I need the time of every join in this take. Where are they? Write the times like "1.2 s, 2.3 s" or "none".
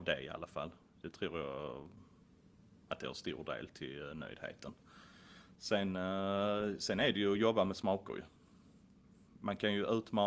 none

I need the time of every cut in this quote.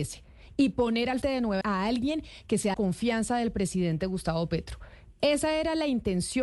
1.2 s, 1.6 s, 2.7 s

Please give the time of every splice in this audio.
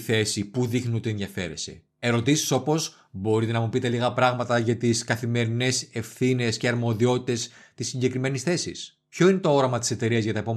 none

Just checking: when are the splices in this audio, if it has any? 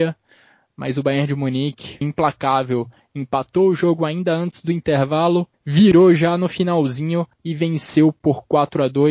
2.0 s, 5.5 s, 7.3 s

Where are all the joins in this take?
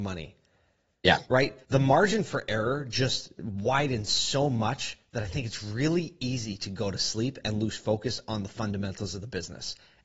1.6 s

